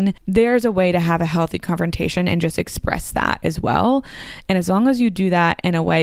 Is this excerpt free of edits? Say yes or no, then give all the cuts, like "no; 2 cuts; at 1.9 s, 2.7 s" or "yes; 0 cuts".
yes; 0 cuts